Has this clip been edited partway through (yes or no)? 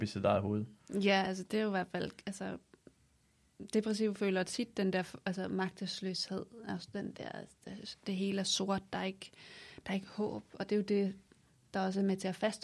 no